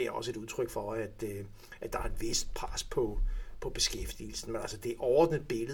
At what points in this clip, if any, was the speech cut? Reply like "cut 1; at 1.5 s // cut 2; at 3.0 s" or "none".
none